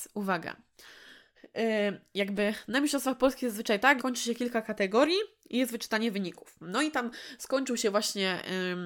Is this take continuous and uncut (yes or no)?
no